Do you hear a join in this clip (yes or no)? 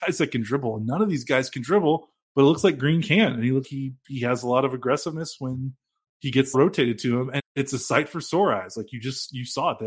yes